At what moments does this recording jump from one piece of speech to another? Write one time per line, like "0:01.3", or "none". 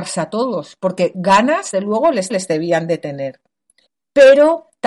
0:01.7
0:02.3
0:03.9